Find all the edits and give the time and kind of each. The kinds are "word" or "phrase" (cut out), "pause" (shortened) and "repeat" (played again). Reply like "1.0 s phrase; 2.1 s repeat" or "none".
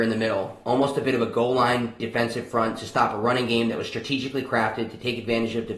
none